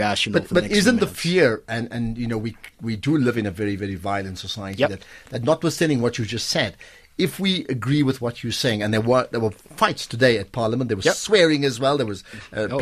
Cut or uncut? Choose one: cut